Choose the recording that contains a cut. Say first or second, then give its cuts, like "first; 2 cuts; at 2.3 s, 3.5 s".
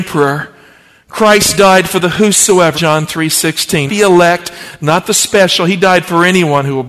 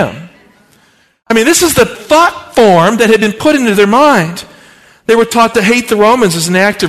first; 2 cuts; at 2.7 s, 3.9 s